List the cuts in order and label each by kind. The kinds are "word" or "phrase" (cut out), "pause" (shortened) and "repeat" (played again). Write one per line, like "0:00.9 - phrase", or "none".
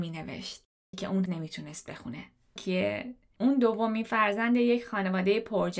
0:00.9 - word
0:01.3 - word
0:02.6 - word